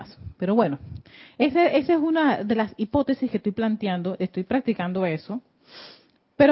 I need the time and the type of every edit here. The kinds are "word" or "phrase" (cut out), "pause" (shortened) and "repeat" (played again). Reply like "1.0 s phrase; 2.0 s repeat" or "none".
none